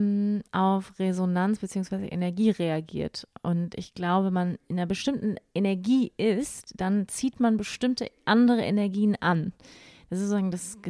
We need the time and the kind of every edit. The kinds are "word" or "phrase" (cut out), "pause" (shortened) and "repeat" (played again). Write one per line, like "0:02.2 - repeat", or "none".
none

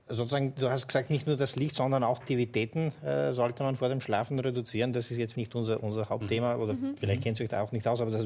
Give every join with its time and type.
0:02.2 - word
0:05.3 - word

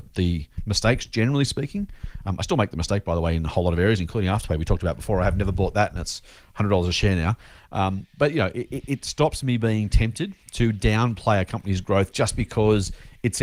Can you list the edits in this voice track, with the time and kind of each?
none

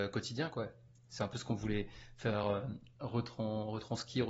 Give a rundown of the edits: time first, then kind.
none

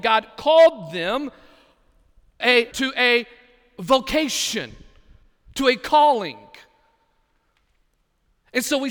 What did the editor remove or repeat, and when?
0:02.4 - word
0:02.7 - word

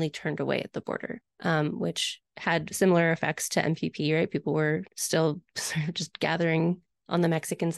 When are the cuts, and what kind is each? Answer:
0:01.3 - pause
0:04.9 - pause

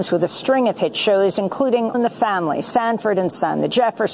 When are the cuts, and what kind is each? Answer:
0:01.9 - word

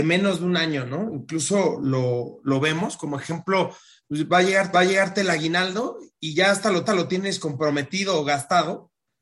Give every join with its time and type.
0:04.7 - repeat
0:06.9 - repeat

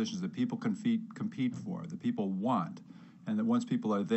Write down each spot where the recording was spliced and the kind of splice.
none

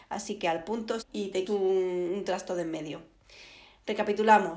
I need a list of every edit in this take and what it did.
0:01.0 - word
0:01.5 - word

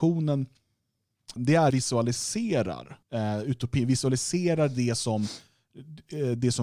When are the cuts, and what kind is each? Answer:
0:01.4 - word
0:01.7 - phrase
0:03.0 - pause

